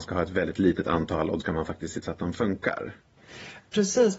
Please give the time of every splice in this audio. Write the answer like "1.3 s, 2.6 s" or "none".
1.4 s, 2.0 s